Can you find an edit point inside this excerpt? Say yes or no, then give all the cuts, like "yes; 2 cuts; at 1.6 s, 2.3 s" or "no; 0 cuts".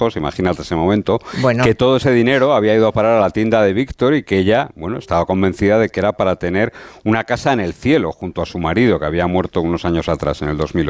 no; 0 cuts